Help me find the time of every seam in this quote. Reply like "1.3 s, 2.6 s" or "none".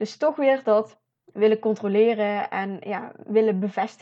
1.1 s